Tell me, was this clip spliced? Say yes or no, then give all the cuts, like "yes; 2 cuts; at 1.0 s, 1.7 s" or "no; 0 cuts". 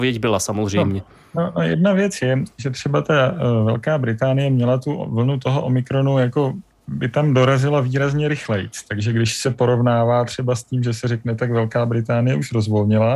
no; 0 cuts